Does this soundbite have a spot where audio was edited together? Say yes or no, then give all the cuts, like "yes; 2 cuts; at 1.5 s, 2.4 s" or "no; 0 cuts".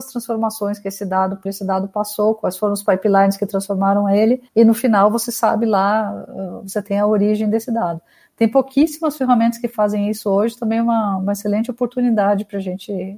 yes; 2 cuts; at 1.5 s, 4.5 s